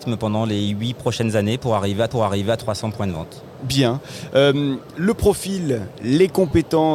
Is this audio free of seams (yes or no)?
no